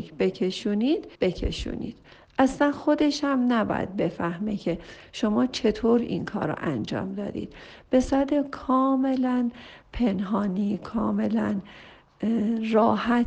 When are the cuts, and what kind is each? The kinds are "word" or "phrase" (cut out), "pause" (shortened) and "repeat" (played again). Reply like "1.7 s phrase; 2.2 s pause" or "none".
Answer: 1.1 s pause